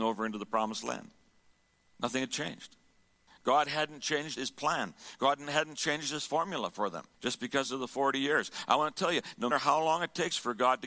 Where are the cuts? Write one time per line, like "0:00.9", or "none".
0:04.4
0:07.1
0:09.5